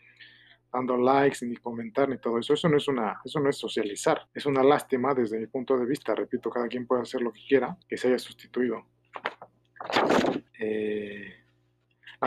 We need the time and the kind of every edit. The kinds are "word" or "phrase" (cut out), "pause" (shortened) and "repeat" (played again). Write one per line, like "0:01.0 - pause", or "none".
0:04.3 - pause
0:07.8 - pause
0:10.5 - pause